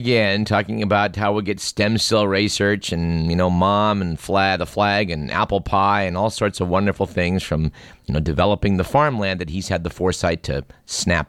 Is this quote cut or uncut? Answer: uncut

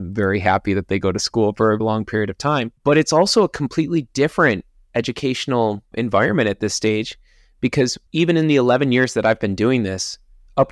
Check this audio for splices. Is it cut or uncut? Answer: cut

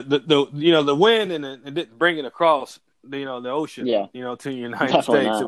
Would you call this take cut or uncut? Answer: uncut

